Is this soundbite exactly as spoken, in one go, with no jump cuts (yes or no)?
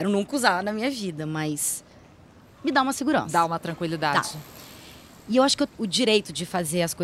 no